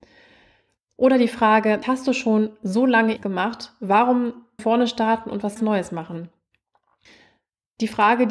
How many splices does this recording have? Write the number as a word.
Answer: four